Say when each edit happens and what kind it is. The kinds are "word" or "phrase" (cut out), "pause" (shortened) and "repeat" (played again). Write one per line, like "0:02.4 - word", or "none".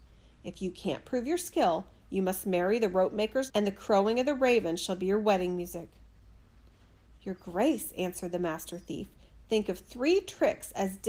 0:03.5 - word

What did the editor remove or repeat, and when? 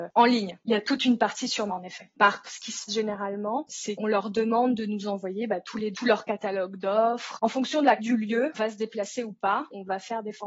0:01.7 - word
0:02.4 - word
0:02.9 - word
0:05.9 - word
0:08.0 - word
0:08.5 - word

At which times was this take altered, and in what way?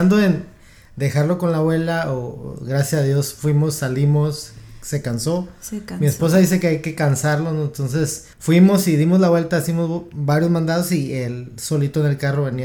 0:08.3 - pause

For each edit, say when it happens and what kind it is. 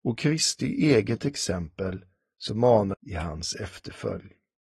0:02.9 - phrase

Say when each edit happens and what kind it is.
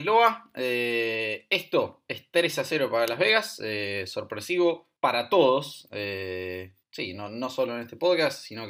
0:05.0 - pause
0:06.8 - pause

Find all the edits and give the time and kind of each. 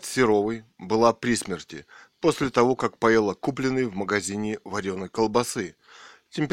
none

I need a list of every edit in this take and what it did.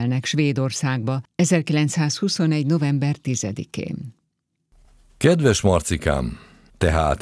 none

